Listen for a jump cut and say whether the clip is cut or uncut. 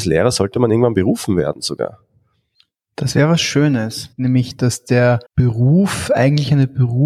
cut